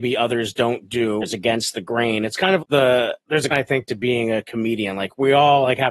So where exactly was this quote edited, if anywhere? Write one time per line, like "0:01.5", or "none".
0:01.2
0:02.6
0:03.5

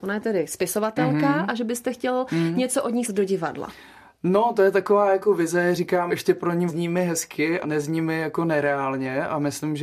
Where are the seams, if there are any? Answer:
0:03.0
0:06.1
0:06.7
0:07.6

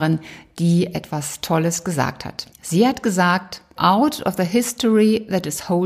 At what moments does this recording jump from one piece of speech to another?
0:02.5
0:03.8

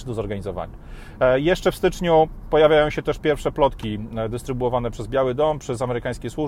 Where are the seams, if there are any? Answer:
none

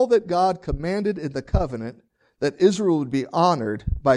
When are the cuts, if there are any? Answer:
none

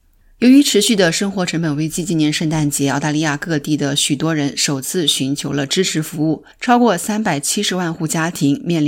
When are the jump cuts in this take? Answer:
0:06.5

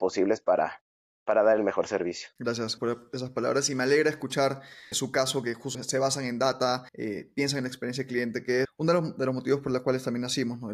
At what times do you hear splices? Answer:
0:02.8
0:04.9
0:05.7
0:06.9
0:08.6

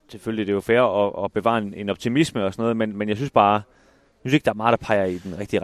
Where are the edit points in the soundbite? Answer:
none

